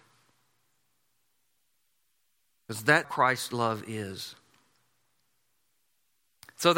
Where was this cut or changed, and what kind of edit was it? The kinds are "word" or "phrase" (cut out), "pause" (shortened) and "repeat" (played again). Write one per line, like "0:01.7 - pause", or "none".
0:03.0 - word